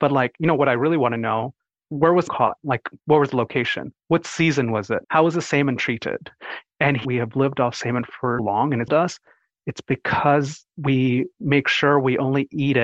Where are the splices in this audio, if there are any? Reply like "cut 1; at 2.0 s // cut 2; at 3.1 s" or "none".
cut 1; at 1.8 s // cut 2; at 2.3 s // cut 3; at 3.0 s // cut 4; at 5.0 s // cut 5; at 7.0 s // cut 6; at 8.4 s // cut 7; at 8.9 s